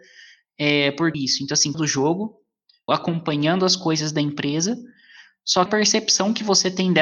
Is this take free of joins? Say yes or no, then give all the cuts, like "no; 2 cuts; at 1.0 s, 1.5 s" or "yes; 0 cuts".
no; 4 cuts; at 1.1 s, 1.7 s, 2.9 s, 5.7 s